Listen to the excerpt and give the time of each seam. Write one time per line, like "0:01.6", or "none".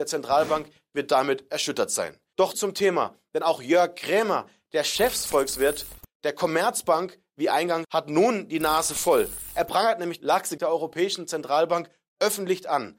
0:02.5
0:07.8
0:10.2
0:10.6